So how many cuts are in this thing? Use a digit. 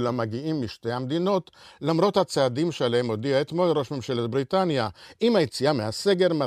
0